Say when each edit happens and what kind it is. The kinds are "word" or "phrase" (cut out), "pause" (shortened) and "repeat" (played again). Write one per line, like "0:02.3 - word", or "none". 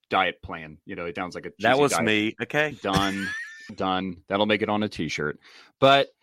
0:01.2 - word
0:02.7 - word
0:03.7 - word